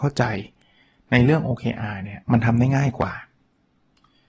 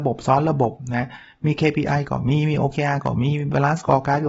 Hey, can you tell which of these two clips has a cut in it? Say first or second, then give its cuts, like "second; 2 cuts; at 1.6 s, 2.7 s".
first; 1 cut; at 2.2 s